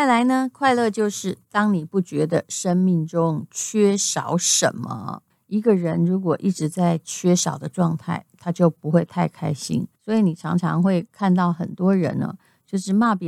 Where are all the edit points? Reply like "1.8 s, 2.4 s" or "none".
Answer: 5.3 s, 9.9 s